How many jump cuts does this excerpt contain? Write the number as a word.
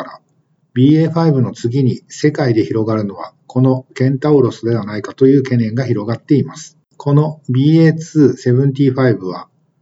one